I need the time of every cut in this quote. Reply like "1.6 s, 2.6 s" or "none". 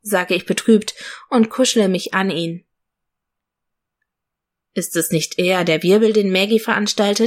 none

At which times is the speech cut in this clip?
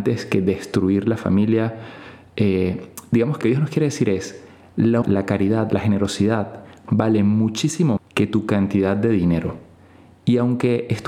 3.4 s, 5.0 s, 8.0 s

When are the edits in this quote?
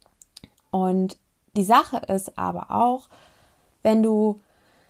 none

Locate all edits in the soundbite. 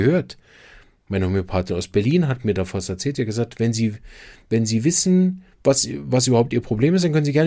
none

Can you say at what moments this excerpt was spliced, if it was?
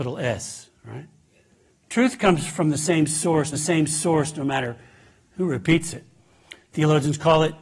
3.5 s

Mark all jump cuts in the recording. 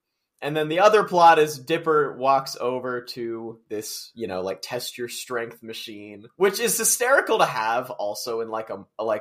none

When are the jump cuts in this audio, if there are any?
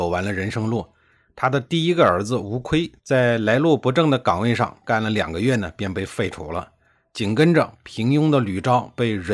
none

